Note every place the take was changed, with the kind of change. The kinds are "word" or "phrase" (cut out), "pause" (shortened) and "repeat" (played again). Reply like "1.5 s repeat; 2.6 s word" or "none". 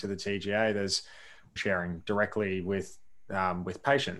1.6 s phrase

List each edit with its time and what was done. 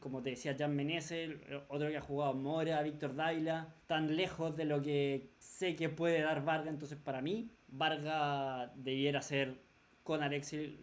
3.8 s pause; 7.6 s pause

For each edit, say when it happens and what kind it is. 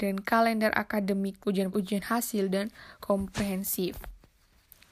1.4 s word; 1.7 s word; 3.0 s word

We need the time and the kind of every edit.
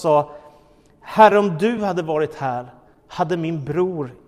none

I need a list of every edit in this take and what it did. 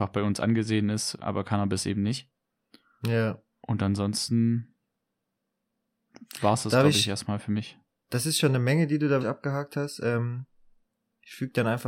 1.2 s word; 9.2 s word

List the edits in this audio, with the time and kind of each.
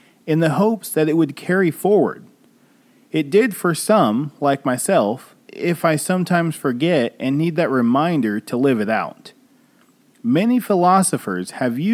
5.5 s word

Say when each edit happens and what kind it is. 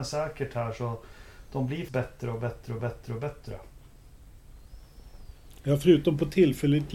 1.9 s word; 2.8 s repeat

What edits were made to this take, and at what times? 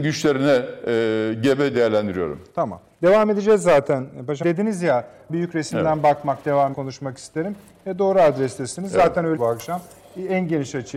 1.7 s word; 4.4 s word; 5.3 s word; 6.7 s word; 9.4 s word

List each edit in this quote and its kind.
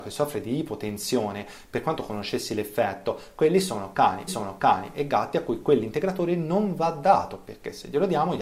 4.3 s repeat

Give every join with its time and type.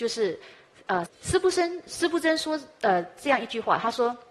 1.1 s word

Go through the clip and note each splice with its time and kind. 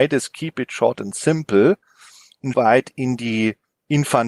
2.5 s word

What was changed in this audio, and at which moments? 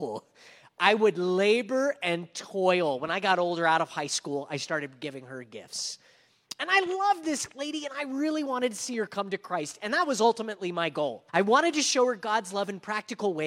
11.3 s pause

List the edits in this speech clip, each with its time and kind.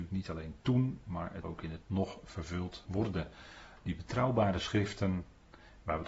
1.4 s word; 1.8 s word; 2.9 s word

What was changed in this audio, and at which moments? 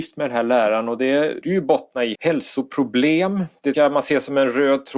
1.4 s word; 2.2 s word; 3.7 s word

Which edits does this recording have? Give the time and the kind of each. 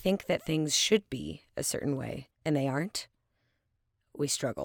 2.3 s pause

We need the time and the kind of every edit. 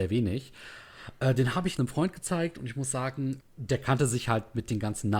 1.8 s word; 3.4 s word

